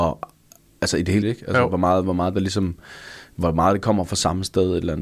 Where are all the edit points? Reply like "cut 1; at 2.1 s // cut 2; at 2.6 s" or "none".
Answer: cut 1; at 1.2 s